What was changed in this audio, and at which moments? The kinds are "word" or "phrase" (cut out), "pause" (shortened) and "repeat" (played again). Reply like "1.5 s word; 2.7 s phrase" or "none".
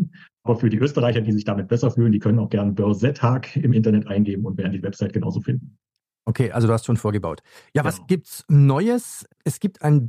none